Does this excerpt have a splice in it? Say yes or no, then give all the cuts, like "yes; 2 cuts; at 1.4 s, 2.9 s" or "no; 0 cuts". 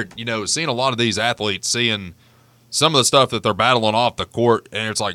no; 0 cuts